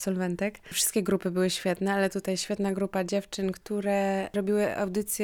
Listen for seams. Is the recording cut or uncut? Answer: uncut